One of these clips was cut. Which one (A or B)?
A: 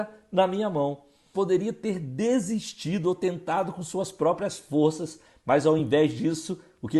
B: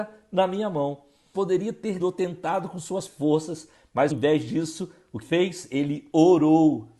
B